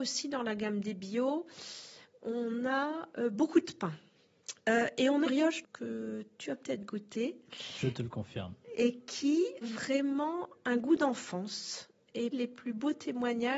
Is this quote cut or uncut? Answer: cut